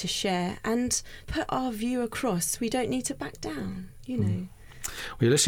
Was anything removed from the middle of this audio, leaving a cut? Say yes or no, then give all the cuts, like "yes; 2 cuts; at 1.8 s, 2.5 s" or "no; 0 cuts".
yes; 1 cut; at 1.2 s